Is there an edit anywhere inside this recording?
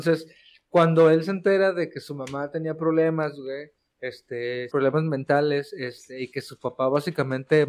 yes; 1 cut; at 4.7 s

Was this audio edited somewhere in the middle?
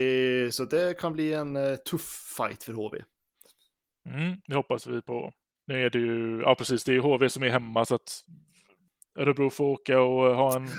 no; 0 cuts

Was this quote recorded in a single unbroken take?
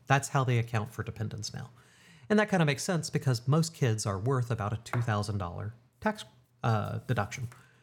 yes; 0 cuts

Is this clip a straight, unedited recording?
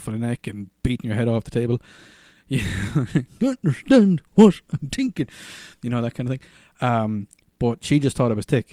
yes; 0 cuts

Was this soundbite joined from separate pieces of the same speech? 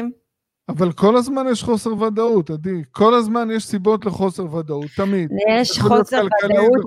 no; 0 cuts

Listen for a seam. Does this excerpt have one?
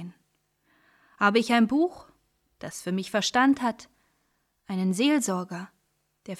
no; 0 cuts

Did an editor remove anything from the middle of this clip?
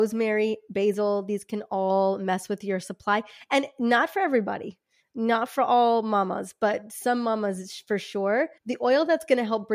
yes; 1 cut; at 8.6 s

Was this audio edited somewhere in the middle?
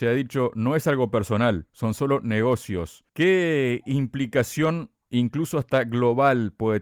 yes; 1 cut; at 3.1 s

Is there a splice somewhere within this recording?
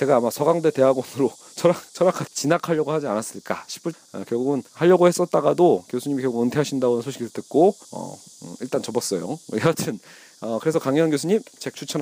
yes; 4 cuts; at 2.3 s, 3.9 s, 4.7 s, 7.8 s

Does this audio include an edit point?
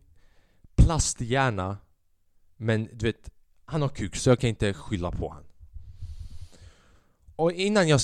no; 0 cuts

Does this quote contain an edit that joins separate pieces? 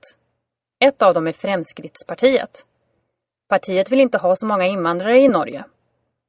no; 0 cuts

